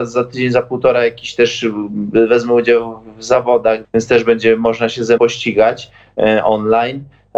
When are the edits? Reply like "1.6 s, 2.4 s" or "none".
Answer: 3.8 s, 5.2 s